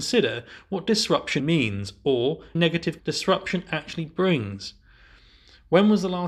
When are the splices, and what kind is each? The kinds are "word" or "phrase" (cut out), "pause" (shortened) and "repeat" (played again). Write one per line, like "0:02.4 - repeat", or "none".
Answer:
0:01.4 - word
0:02.5 - word
0:03.0 - word